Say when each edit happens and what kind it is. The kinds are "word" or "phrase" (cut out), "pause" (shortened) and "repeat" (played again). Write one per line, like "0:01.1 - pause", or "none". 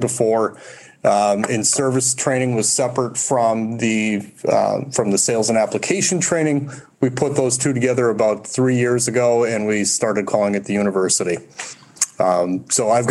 none